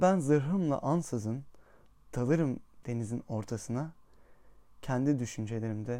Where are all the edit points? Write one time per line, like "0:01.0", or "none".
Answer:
none